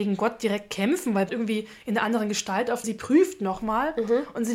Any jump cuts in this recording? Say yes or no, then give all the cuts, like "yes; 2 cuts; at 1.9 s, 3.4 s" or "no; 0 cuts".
yes; 2 cuts; at 1.3 s, 2.8 s